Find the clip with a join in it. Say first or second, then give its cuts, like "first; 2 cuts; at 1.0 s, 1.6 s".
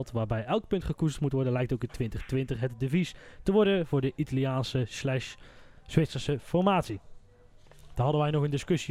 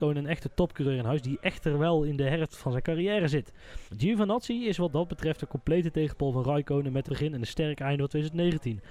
second; 2 cuts; at 3.9 s, 7.1 s